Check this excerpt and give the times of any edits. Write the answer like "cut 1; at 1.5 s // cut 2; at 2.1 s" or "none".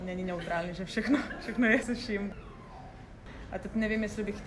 cut 1; at 1.8 s

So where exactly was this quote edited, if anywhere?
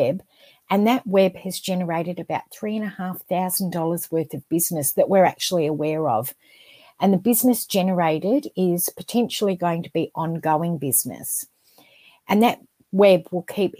none

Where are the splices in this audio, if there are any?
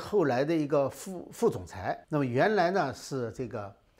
cut 1; at 2.0 s

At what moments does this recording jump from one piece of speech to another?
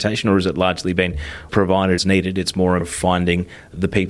cut 1; at 1.5 s // cut 2; at 2.0 s // cut 3; at 2.8 s

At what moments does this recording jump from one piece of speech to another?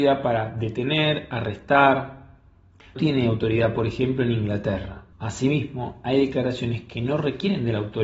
cut 1; at 3.0 s // cut 2; at 5.1 s

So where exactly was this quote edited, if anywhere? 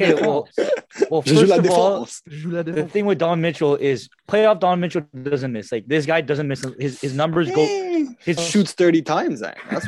cut 1; at 4.2 s // cut 2; at 8.4 s

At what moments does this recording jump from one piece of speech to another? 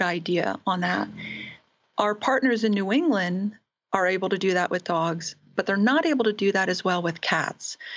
none

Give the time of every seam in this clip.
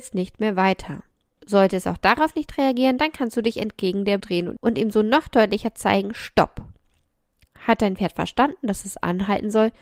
cut 1; at 4.2 s

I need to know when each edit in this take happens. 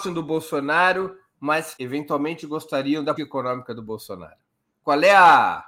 cut 1; at 1.8 s // cut 2; at 3.2 s

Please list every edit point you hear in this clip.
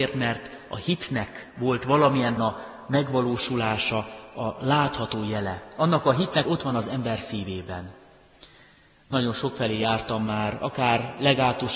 cut 1; at 2.4 s // cut 2; at 6.4 s

